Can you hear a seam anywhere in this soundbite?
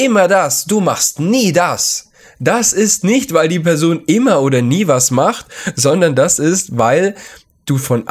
no; 0 cuts

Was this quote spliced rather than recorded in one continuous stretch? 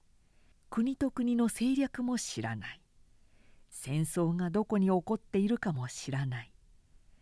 no; 0 cuts

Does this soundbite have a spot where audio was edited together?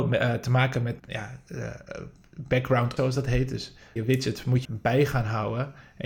yes; 4 cuts; at 1.0 s, 3.0 s, 4.0 s, 4.6 s

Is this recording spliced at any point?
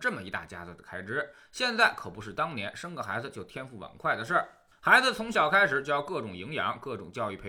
no; 0 cuts

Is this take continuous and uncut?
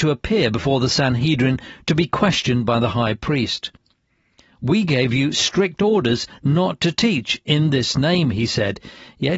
yes; 0 cuts

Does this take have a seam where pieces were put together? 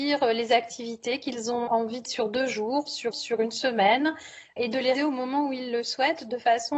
yes; 4 cuts; at 1.7 s, 2.0 s, 3.1 s, 4.9 s

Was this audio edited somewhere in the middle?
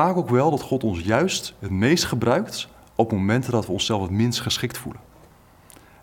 no; 0 cuts

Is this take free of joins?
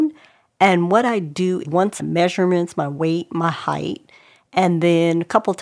no; 2 cuts; at 1.6 s, 2.0 s

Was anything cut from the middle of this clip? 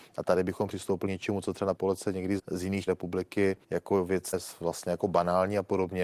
yes; 7 cuts; at 1.1 s, 1.8 s, 2.4 s, 2.9 s, 3.6 s, 4.3 s, 5.0 s

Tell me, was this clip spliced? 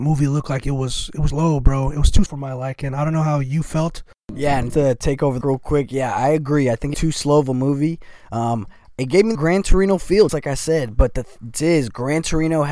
yes; 8 cuts; at 1.3 s, 2.3 s, 4.7 s, 5.4 s, 6.9 s, 9.3 s, 10.3 s, 11.5 s

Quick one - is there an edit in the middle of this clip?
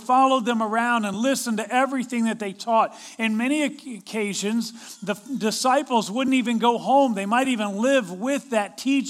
no; 0 cuts

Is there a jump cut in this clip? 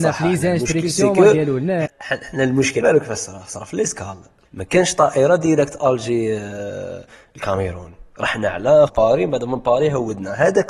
yes; 4 cuts; at 1.9 s, 2.8 s, 4.4 s, 8.9 s

